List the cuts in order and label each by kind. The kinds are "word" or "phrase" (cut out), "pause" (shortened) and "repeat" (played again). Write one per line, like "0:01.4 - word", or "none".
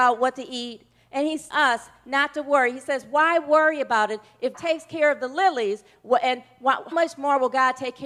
0:01.5 - word
0:04.5 - word
0:06.9 - word